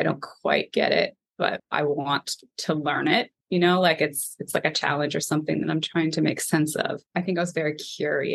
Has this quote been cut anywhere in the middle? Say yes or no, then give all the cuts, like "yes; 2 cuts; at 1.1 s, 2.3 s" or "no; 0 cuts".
yes; 3 cuts; at 3.4 s, 4.5 s, 7.1 s